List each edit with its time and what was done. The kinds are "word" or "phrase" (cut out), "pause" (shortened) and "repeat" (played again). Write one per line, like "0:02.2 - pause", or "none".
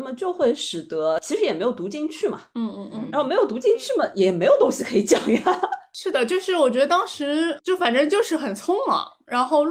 0:07.6 - word

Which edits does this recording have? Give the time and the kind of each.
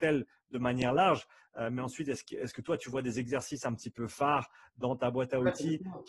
none

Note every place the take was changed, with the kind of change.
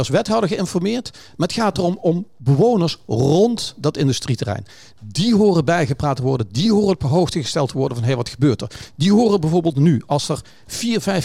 none

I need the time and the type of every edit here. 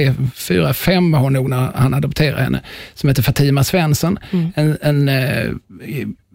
none

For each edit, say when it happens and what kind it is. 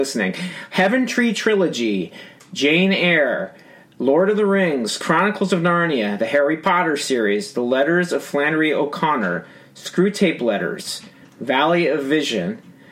none

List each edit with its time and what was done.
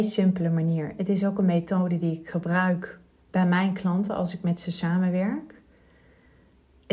none

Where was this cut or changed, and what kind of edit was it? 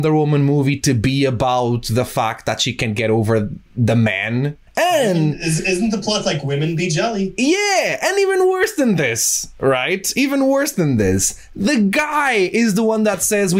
0:03.7 - pause
0:04.7 - pause

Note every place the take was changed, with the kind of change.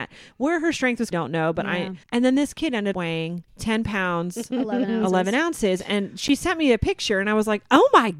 0:01.1 - phrase
0:02.0 - pause
0:02.9 - word
0:03.5 - pause

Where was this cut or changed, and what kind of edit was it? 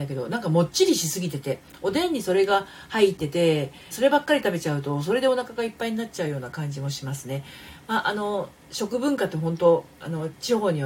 0:03.9 - phrase

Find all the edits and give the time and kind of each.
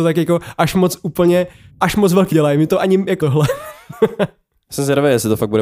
0:01.7 - pause
0:02.3 - phrase
0:03.2 - word

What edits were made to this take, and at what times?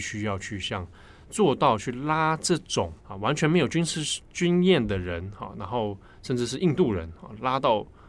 0:03.0 - pause

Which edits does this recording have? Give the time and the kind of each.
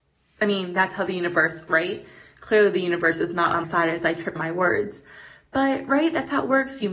0:01.7 - word
0:03.6 - word
0:04.4 - word

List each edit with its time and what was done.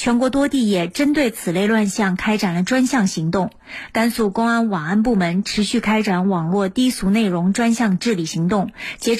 none

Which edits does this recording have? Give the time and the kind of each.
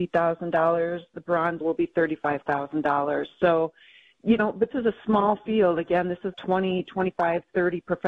0:01.6 - word
0:04.4 - word
0:04.7 - word
0:06.3 - word

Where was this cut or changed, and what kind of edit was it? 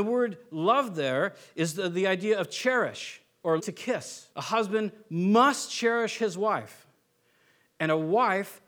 0:03.6 - word
0:04.3 - pause

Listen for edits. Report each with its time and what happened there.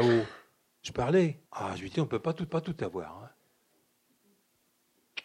0:00.9 - phrase
0:01.5 - pause
0:01.9 - word
0:02.5 - repeat

